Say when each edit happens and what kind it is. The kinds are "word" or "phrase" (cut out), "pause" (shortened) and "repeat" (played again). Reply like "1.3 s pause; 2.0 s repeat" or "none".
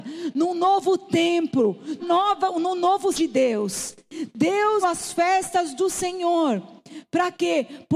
2.0 s word; 3.1 s word; 4.8 s word